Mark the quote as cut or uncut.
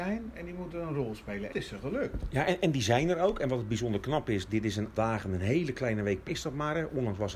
cut